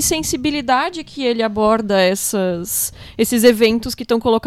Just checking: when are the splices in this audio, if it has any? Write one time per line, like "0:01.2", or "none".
none